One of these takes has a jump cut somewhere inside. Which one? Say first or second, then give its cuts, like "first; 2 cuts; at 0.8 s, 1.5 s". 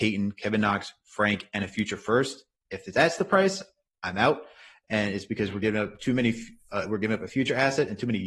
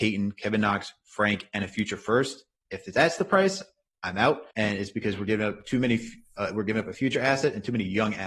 second; 1 cut; at 4.5 s